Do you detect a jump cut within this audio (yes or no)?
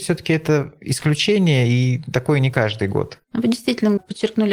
no